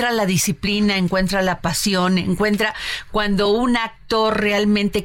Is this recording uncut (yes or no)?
yes